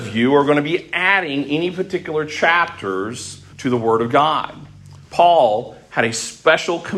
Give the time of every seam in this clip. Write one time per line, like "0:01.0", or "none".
0:03.5
0:05.0